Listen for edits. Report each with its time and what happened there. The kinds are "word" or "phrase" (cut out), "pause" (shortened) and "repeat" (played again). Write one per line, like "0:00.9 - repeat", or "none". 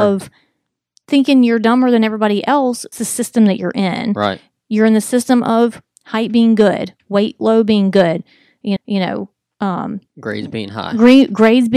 0:02.9 - phrase
0:08.8 - repeat
0:10.1 - pause